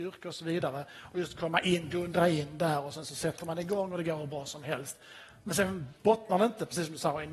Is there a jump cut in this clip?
no; 0 cuts

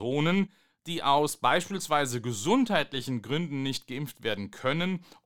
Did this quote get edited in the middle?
no; 0 cuts

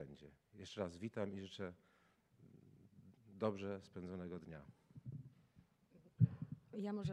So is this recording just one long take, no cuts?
yes; 0 cuts

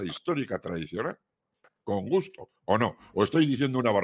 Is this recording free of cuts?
yes; 0 cuts

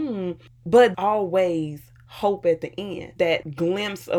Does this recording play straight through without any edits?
no; 2 cuts; at 0.9 s, 3.2 s

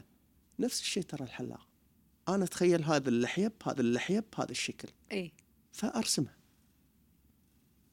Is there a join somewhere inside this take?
yes; 1 cut; at 3.8 s

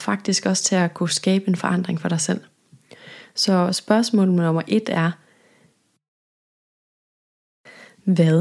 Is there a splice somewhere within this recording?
no; 0 cuts

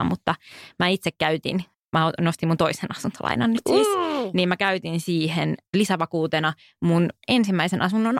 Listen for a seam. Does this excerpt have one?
no; 0 cuts

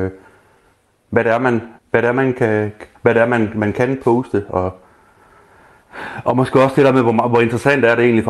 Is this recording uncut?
no; 2 cuts; at 1.8 s, 2.9 s

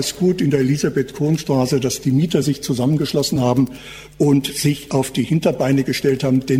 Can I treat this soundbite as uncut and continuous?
yes; 0 cuts

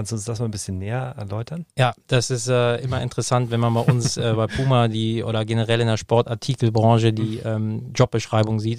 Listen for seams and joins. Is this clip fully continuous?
no; 1 cut; at 1.7 s

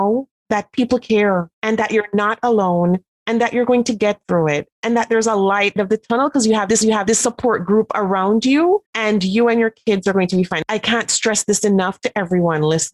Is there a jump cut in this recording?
yes; 5 cuts; at 1.5 s, 4.7 s, 5.8 s, 6.8 s, 8.9 s

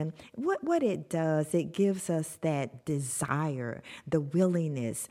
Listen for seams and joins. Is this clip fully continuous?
yes; 0 cuts

